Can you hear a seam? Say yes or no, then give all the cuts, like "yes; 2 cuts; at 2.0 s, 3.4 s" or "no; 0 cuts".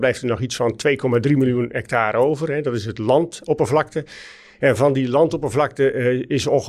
no; 0 cuts